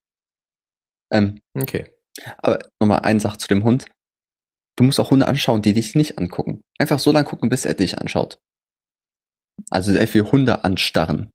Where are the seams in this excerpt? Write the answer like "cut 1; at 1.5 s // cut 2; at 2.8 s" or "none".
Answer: none